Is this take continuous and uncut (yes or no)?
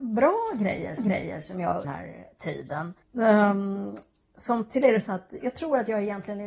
no